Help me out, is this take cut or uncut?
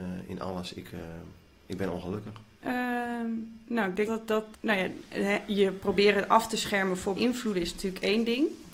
cut